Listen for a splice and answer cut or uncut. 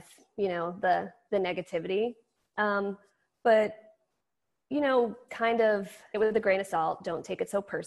cut